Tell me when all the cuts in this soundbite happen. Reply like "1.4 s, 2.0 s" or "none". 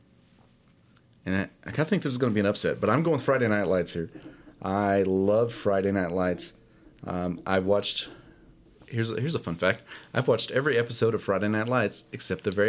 none